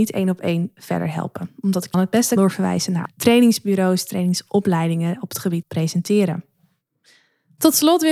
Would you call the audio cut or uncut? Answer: cut